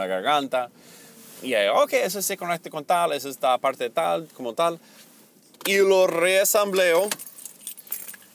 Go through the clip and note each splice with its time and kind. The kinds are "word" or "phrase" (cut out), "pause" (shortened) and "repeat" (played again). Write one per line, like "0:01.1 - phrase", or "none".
none